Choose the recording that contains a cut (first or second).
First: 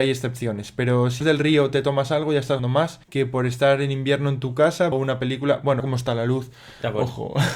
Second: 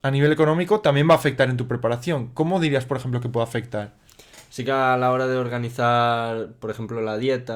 first